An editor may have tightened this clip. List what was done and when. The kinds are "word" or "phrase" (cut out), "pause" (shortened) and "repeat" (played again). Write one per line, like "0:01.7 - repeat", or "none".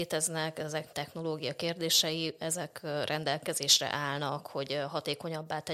0:00.9 - word